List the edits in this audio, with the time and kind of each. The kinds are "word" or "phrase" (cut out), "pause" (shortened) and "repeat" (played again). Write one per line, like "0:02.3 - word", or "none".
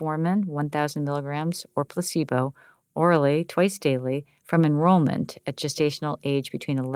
none